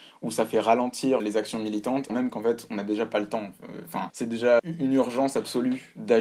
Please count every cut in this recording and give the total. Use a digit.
4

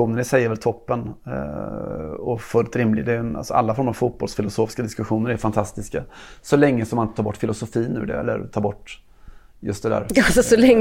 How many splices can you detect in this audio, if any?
0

